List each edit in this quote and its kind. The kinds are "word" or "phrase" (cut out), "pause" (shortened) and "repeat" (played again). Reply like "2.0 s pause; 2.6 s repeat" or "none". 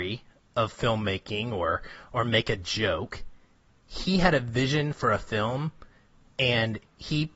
none